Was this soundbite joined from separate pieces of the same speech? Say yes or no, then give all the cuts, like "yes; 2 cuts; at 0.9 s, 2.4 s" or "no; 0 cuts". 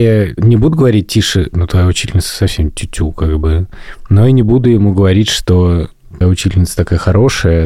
yes; 2 cuts; at 1.5 s, 6.2 s